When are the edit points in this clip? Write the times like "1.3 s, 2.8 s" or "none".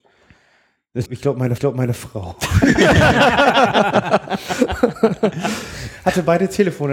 1.1 s, 1.6 s